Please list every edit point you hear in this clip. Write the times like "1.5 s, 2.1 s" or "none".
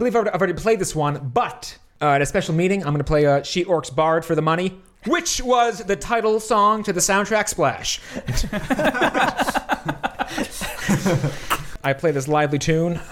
none